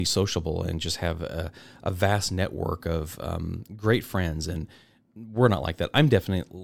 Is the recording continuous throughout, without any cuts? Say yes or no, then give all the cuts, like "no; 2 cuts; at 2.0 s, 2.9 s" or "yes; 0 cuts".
yes; 0 cuts